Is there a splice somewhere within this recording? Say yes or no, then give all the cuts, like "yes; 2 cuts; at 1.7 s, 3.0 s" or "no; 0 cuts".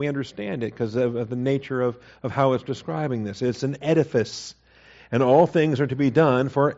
no; 0 cuts